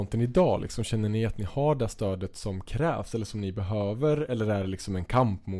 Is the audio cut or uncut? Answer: uncut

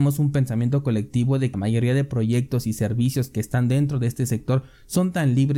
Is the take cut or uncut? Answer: cut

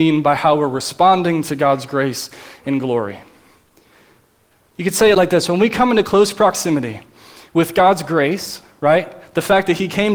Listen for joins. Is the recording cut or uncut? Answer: uncut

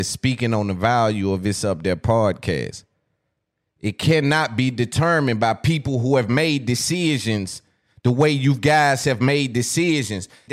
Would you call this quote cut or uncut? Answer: uncut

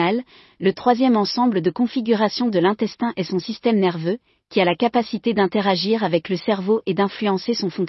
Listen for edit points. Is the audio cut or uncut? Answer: uncut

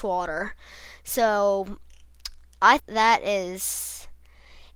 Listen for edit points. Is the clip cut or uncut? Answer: cut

